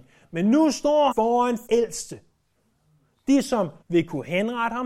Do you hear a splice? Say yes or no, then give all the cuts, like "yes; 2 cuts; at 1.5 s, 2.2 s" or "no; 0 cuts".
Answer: yes; 3 cuts; at 1.1 s, 1.7 s, 3.8 s